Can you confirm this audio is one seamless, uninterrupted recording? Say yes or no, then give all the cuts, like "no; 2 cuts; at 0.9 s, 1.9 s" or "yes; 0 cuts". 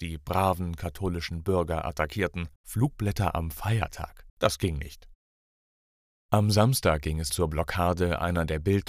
no; 3 cuts; at 2.6 s, 4.3 s, 7.3 s